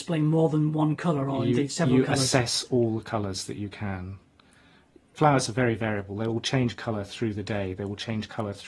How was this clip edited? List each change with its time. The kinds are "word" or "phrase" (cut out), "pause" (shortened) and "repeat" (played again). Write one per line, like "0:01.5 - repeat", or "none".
none